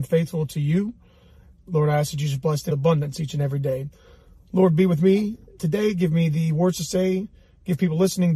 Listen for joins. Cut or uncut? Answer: cut